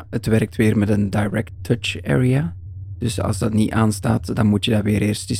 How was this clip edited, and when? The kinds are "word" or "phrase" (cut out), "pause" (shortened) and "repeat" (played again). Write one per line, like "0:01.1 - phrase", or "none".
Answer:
none